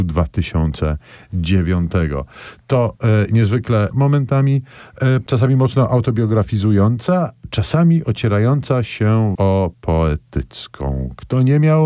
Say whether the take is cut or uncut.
cut